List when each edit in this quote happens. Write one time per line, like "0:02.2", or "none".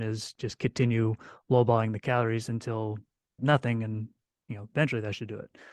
0:03.4